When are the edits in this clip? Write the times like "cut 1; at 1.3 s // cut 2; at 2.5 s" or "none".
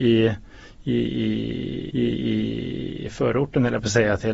cut 1; at 1.9 s